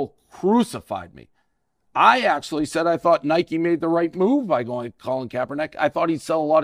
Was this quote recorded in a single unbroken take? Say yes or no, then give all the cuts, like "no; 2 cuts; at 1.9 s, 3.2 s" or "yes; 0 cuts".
yes; 0 cuts